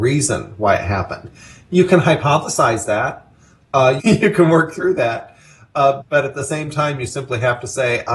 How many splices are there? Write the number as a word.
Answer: two